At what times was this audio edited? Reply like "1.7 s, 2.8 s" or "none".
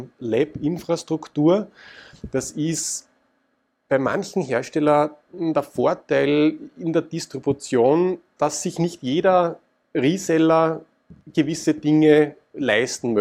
8.4 s